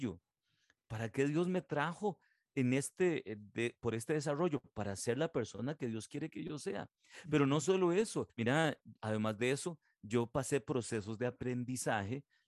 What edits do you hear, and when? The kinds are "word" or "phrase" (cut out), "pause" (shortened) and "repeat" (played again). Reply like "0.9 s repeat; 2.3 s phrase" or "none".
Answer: 8.3 s pause